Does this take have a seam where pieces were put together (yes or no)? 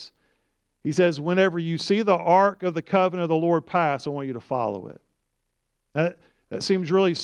no